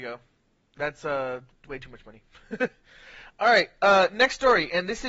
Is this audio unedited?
yes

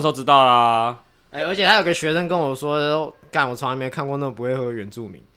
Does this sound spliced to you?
no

